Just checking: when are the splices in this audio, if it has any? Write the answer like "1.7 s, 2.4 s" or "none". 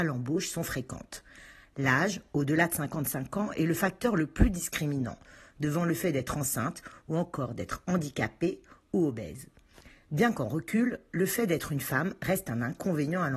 none